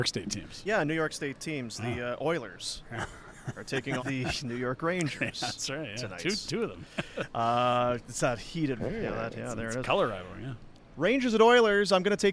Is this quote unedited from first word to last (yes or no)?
no